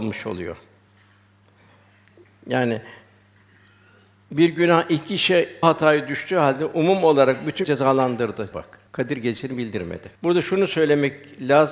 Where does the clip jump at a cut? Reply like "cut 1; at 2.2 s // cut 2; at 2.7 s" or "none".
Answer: cut 1; at 5.6 s // cut 2; at 7.6 s // cut 3; at 8.5 s // cut 4; at 8.9 s // cut 5; at 10.1 s